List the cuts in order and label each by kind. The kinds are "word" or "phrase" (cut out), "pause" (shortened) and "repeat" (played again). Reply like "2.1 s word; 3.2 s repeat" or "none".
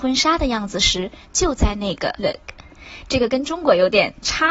2.2 s word